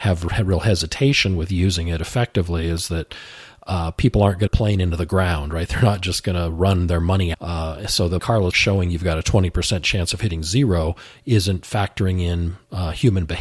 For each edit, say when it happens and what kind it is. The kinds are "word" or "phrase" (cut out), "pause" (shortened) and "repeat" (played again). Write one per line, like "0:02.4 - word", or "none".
0:04.5 - phrase
0:07.3 - word
0:08.2 - word
0:08.5 - word